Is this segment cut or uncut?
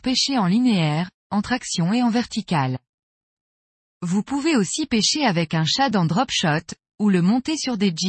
uncut